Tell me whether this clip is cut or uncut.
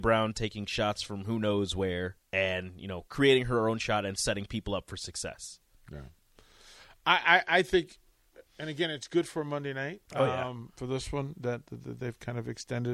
cut